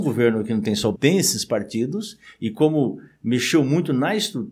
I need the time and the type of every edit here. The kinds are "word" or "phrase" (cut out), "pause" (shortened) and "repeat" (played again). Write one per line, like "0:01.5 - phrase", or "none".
0:01.0 - word